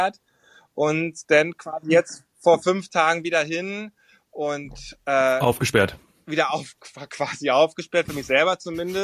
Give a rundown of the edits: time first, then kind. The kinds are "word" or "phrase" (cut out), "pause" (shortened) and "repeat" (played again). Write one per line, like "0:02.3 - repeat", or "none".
none